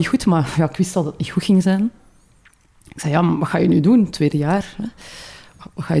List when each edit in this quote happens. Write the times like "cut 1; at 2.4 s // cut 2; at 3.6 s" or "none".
none